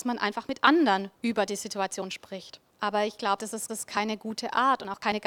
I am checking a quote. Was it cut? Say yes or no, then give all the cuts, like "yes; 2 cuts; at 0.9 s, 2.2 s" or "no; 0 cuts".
yes; 3 cuts; at 1.1 s, 2.7 s, 3.7 s